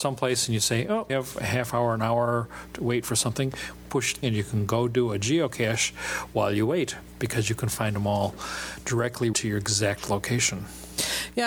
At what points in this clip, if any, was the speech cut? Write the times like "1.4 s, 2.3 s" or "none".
1.1 s, 4.2 s, 9.3 s